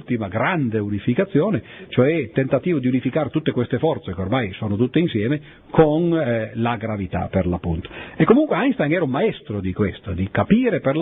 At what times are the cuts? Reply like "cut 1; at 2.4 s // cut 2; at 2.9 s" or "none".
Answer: none

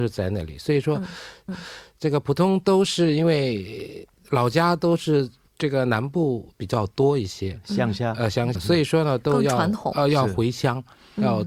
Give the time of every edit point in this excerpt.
cut 1; at 1.5 s // cut 2; at 5.5 s // cut 3; at 8.5 s

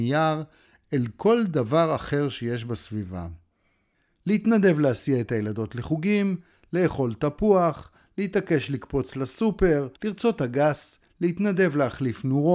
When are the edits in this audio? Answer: cut 1; at 10.0 s

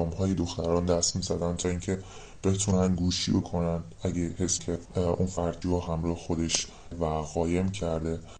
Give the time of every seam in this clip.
cut 1; at 3.4 s // cut 2; at 4.6 s // cut 3; at 5.6 s // cut 4; at 6.9 s

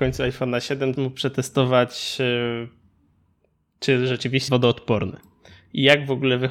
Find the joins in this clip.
cut 1; at 0.9 s // cut 2; at 4.5 s

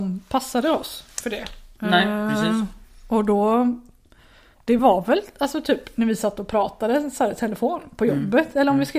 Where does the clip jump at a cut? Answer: none

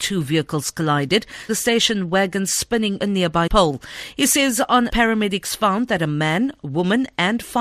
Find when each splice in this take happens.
cut 1; at 1.5 s // cut 2; at 3.0 s // cut 3; at 3.5 s // cut 4; at 4.9 s

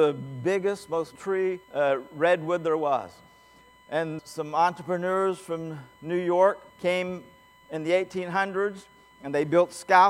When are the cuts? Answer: cut 1; at 1.2 s // cut 2; at 1.6 s // cut 3; at 4.2 s // cut 4; at 6.7 s

